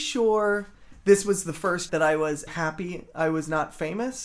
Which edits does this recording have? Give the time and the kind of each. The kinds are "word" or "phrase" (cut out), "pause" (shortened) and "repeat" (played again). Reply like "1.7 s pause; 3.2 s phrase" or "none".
1.9 s word; 2.5 s word